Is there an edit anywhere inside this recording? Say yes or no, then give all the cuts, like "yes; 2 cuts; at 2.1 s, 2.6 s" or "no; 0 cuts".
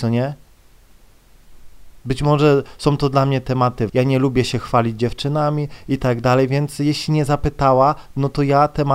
yes; 2 cuts; at 2.0 s, 3.9 s